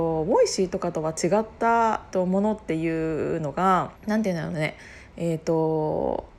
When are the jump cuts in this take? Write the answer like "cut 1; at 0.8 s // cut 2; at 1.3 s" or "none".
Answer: cut 1; at 2.1 s // cut 2; at 4.0 s